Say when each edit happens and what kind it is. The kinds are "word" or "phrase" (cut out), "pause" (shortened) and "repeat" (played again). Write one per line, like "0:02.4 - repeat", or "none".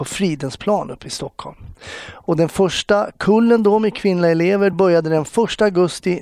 none